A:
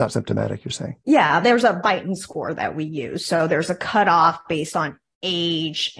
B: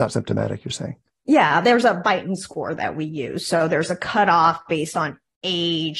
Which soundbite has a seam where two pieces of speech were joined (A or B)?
A